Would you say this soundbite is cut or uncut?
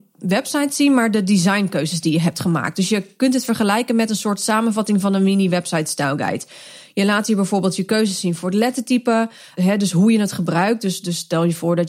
uncut